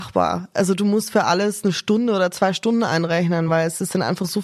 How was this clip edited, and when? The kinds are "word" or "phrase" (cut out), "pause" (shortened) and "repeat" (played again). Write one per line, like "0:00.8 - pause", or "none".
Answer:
none